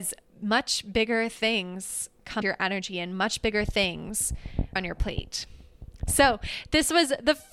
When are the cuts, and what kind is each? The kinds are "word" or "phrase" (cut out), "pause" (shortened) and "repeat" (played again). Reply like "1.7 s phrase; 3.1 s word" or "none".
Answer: 2.4 s word; 4.8 s word